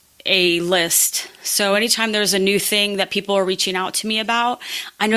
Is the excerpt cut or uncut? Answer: uncut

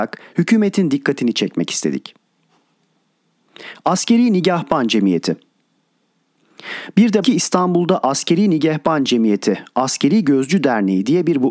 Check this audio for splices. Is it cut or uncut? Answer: cut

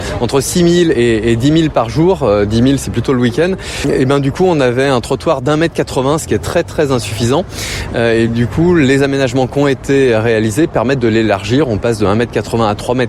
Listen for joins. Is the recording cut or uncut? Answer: uncut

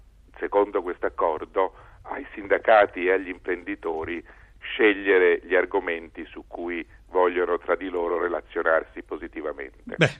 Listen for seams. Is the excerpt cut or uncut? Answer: uncut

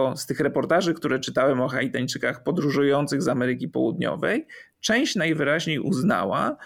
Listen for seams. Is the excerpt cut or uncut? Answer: uncut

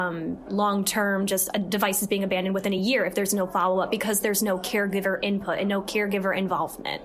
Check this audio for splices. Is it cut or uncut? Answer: uncut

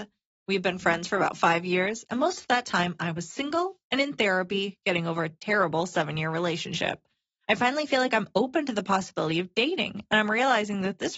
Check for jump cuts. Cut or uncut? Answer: uncut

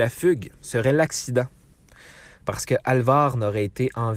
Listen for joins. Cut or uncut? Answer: uncut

